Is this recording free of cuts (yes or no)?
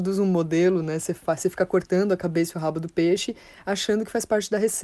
yes